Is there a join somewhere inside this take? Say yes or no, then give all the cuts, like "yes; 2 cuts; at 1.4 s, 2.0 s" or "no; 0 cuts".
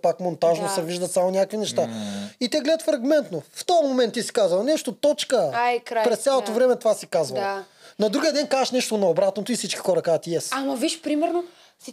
no; 0 cuts